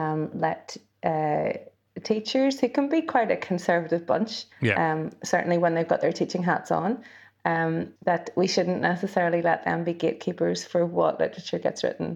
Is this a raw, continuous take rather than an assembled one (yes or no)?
no